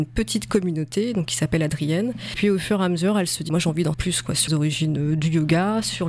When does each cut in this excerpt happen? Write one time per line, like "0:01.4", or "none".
0:03.5
0:03.9
0:04.5